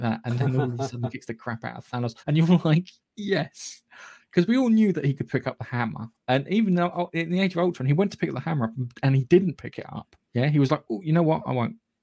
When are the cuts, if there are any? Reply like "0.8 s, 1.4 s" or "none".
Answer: 2.2 s, 10.2 s